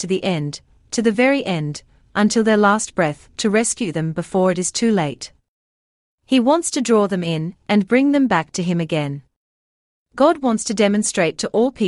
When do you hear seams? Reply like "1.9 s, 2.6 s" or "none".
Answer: none

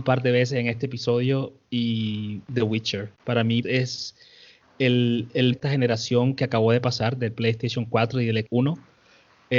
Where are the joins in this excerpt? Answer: 2.4 s, 3.1 s, 3.6 s, 5.5 s, 8.4 s

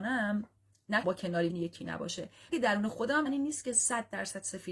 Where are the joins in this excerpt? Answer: 1.0 s, 1.5 s, 2.5 s, 3.3 s

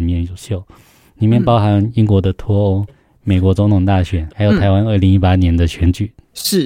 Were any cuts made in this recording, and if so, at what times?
2.9 s, 4.3 s

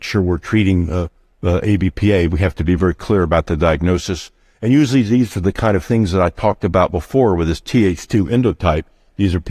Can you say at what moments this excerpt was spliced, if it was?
none

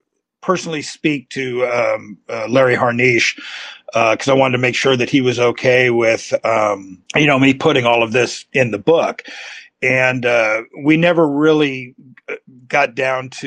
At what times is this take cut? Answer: 7.1 s

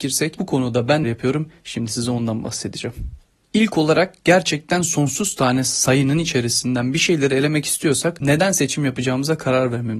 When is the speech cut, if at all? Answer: 1.0 s

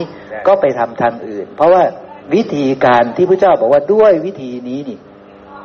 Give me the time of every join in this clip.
2.2 s

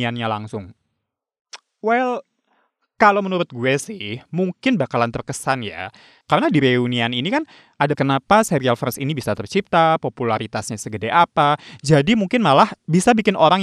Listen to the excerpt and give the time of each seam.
7.9 s

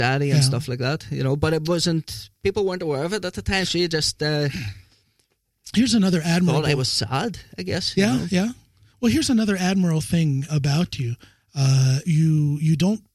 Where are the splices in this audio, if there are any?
3.7 s, 10.5 s, 12.0 s

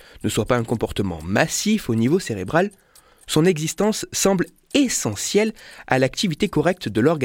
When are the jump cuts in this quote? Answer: none

